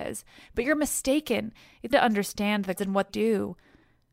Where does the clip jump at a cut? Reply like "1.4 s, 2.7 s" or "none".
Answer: 1.9 s, 2.8 s, 3.1 s